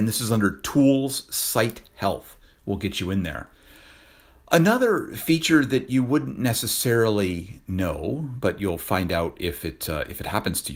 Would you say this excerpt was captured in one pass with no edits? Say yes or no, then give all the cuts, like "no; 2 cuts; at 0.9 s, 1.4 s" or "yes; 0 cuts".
yes; 0 cuts